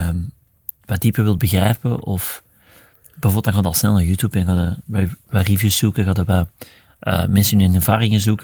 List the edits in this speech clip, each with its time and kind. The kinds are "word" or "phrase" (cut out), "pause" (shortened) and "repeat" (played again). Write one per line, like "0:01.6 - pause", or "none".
none

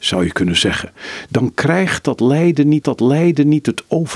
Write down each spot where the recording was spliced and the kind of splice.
0:02.8 - repeat

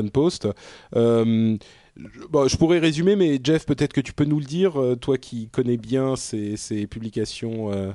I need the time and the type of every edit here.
none

